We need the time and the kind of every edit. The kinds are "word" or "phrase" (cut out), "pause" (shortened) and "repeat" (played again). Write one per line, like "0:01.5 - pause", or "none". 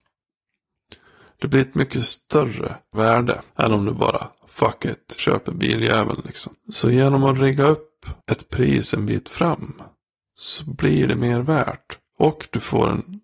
0:02.9 - word
0:03.5 - pause
0:05.2 - phrase
0:06.6 - pause
0:08.2 - pause